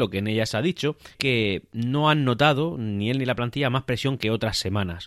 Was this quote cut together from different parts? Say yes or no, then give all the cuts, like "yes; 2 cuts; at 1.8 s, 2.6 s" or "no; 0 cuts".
yes; 1 cut; at 1.1 s